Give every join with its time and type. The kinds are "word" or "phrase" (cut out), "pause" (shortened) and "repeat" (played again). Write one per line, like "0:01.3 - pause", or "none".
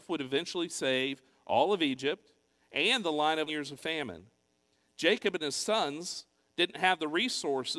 0:03.5 - phrase